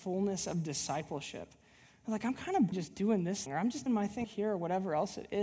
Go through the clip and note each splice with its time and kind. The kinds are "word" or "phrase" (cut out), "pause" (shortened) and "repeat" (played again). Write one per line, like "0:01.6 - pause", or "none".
0:02.7 - word
0:03.5 - word
0:03.9 - word
0:04.2 - word